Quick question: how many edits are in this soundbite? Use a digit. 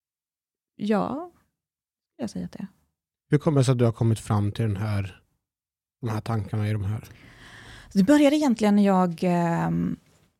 0